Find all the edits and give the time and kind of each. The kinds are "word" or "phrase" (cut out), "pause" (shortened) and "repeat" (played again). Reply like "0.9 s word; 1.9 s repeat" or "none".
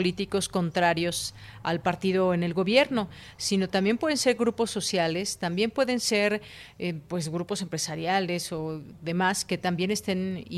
none